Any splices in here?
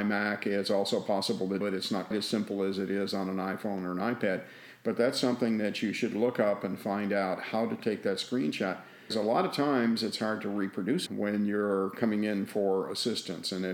yes; 4 cuts; at 1.6 s, 2.1 s, 9.1 s, 11.1 s

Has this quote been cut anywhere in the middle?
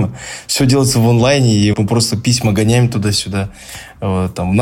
yes; 1 cut; at 1.7 s

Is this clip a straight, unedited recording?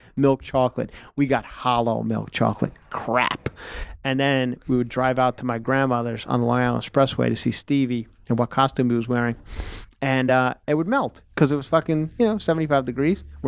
yes; 0 cuts

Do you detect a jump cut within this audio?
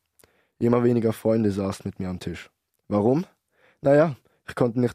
no; 0 cuts

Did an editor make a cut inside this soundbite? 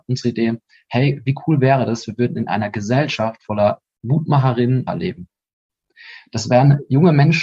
yes; 1 cut; at 4.9 s

